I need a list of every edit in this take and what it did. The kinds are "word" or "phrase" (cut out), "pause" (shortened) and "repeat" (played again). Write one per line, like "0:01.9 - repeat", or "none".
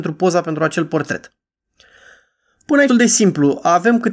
0:02.9 - word